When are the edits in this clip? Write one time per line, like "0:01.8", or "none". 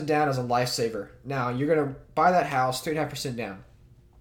none